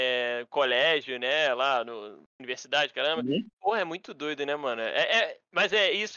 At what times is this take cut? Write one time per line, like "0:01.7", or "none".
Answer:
0:03.5